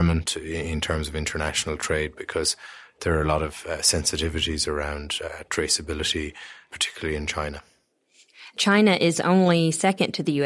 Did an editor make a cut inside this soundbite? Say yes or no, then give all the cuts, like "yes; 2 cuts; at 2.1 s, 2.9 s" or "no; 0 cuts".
no; 0 cuts